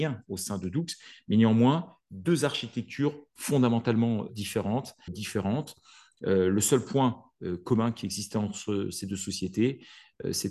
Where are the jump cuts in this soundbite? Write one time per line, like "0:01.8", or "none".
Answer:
0:02.0
0:04.3
0:05.1